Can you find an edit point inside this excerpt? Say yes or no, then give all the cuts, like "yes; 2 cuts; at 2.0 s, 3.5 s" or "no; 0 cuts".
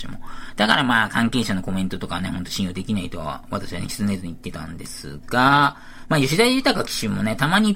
no; 0 cuts